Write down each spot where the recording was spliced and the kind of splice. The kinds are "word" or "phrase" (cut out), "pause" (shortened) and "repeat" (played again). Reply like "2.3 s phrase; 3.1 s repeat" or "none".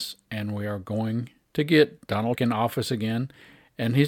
2.4 s phrase